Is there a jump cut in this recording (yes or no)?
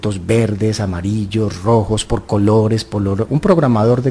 no